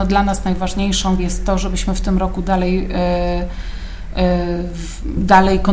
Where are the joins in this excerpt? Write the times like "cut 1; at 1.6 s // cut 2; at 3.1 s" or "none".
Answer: cut 1; at 1.2 s